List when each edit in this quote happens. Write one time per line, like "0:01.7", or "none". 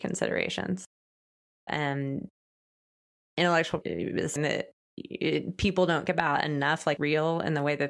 0:01.7
0:03.8
0:04.4
0:06.1
0:07.0